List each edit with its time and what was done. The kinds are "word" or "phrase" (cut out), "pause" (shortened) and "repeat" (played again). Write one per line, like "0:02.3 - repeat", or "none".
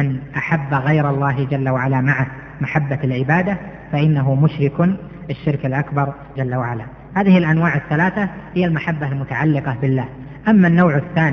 0:06.4 - word